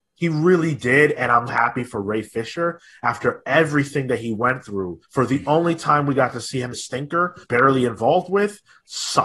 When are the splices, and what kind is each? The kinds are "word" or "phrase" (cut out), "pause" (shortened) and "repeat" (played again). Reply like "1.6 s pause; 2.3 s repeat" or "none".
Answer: 1.5 s word; 5.0 s pause; 6.7 s phrase; 7.4 s phrase

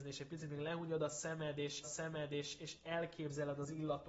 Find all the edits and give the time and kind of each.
1.8 s repeat

